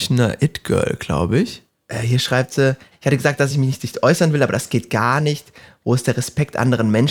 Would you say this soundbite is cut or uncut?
uncut